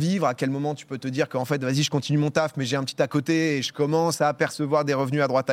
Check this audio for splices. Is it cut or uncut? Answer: uncut